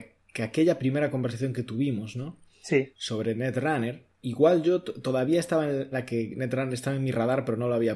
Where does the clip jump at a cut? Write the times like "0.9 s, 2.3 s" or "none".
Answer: 4.2 s, 5.9 s

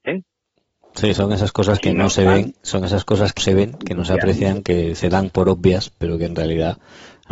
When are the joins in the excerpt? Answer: 3.4 s

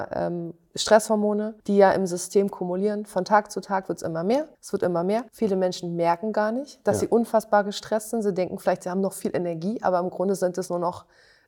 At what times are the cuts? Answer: 1.6 s, 4.5 s, 5.3 s

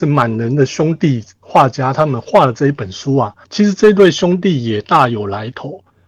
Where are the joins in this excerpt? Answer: 3.4 s

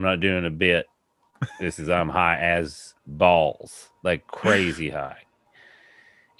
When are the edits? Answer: 3.0 s

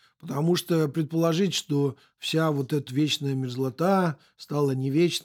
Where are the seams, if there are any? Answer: 2.9 s

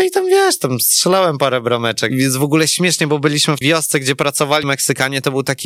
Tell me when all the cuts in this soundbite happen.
2.1 s, 3.6 s, 4.6 s

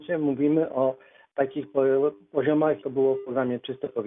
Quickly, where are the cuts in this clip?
2.8 s

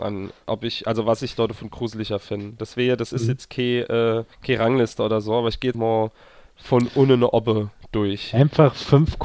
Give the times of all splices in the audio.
4.3 s, 5.7 s

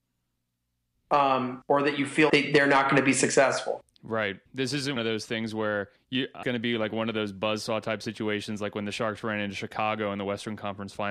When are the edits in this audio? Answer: 2.3 s, 4.5 s, 5.0 s, 6.0 s, 6.4 s

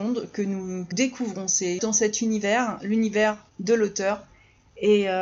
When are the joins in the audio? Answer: 0.9 s, 1.8 s, 3.5 s

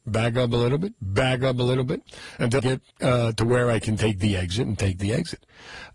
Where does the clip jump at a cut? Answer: 2.6 s, 2.9 s

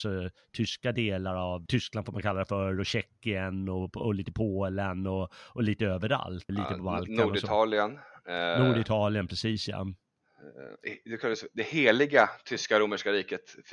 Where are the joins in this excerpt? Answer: 1.7 s, 6.5 s

